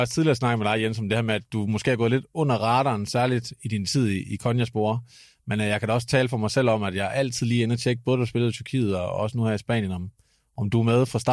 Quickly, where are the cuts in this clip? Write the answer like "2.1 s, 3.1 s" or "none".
none